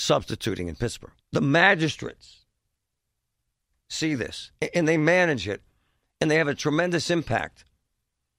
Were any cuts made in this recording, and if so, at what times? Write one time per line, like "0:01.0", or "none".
0:01.2